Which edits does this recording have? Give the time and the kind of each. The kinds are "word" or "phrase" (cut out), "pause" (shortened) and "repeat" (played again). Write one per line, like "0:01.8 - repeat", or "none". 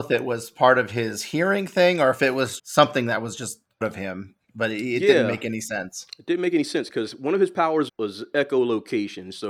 0:02.6 - word
0:03.8 - phrase
0:07.9 - word